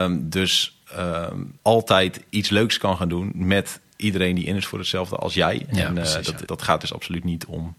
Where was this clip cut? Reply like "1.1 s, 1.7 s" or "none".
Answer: 1.6 s, 6.5 s